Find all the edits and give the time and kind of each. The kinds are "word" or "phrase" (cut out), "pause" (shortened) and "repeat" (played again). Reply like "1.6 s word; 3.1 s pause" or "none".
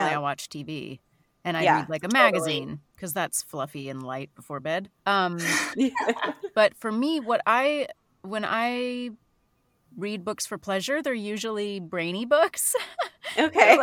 none